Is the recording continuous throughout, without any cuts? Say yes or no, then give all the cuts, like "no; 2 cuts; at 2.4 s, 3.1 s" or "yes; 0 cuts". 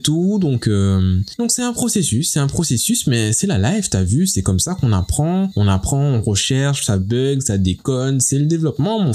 yes; 0 cuts